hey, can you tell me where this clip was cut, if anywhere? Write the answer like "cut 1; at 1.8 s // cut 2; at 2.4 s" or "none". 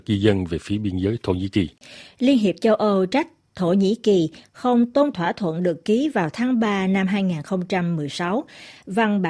cut 1; at 5.1 s